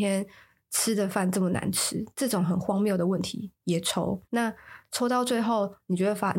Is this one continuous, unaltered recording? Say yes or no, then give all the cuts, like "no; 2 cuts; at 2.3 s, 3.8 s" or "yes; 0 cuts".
no; 1 cut; at 4.3 s